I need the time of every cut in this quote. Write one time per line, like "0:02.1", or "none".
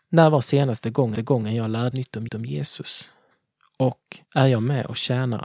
0:01.1
0:01.9
0:02.3
0:04.3